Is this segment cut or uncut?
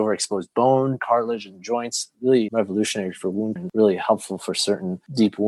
cut